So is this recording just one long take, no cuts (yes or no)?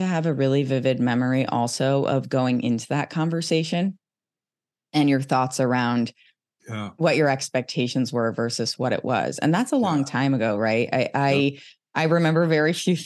yes